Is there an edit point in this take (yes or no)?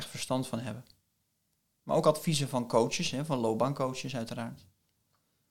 no